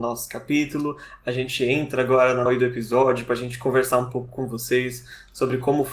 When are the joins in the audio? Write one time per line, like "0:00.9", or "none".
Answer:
0:02.5